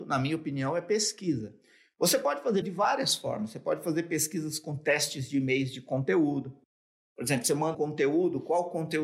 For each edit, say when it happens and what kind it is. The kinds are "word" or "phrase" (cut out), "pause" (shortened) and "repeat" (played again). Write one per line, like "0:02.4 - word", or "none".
0:02.6 - word
0:07.7 - word